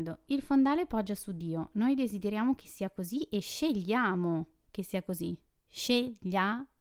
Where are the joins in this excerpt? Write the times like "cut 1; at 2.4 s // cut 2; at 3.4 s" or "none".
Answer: none